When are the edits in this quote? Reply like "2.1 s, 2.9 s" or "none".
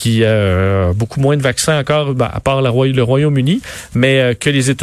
none